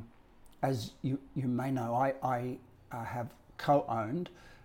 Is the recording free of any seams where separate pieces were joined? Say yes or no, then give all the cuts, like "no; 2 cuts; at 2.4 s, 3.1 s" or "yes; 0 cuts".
yes; 0 cuts